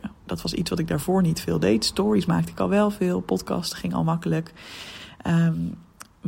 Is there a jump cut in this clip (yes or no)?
no